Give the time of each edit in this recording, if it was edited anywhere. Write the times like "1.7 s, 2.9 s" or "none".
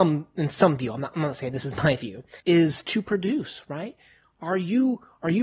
2.4 s